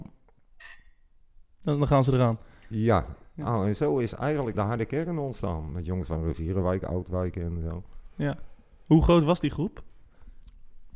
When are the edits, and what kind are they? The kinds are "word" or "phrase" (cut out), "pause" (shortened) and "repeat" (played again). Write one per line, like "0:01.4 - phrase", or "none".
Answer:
0:04.5 - word